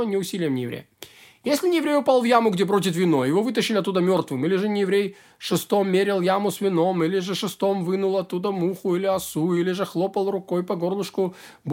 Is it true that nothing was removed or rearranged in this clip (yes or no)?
yes